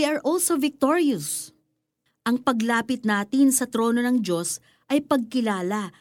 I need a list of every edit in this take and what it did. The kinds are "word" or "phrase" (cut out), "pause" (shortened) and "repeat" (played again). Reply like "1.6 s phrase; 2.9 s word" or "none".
none